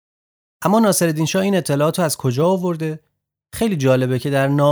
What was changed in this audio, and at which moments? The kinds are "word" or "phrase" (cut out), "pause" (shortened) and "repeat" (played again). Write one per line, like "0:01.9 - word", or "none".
none